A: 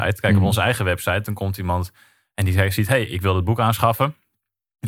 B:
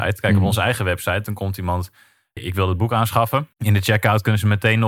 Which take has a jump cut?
B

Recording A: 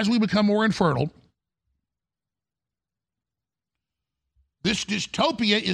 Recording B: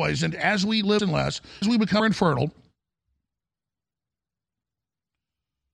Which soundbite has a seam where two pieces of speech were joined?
B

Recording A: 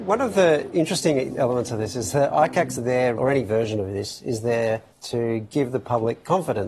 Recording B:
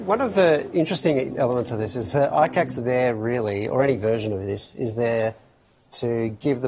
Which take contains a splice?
A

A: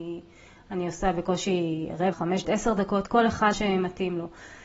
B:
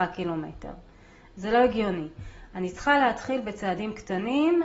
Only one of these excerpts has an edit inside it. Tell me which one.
A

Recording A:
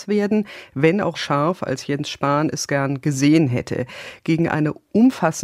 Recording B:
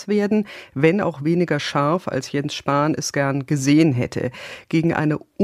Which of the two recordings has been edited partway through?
A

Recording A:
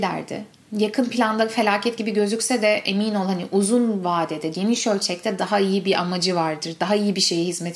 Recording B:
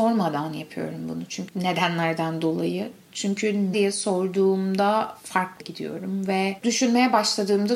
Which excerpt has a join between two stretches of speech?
B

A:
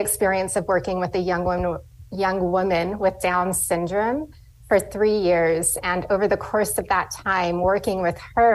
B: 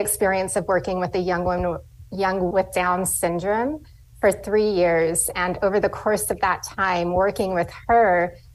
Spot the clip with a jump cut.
B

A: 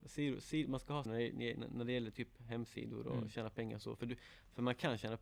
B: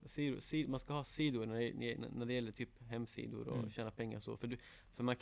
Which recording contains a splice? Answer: A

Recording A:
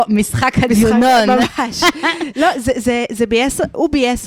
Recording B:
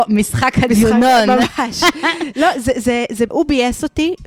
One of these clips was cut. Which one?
B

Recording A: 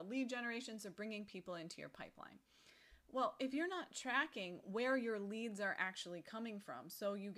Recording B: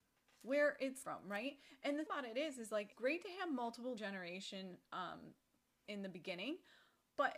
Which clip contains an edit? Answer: B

